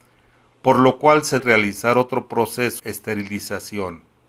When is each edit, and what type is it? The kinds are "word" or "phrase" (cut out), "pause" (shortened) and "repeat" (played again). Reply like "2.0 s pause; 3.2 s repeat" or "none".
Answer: 1.4 s word; 2.8 s word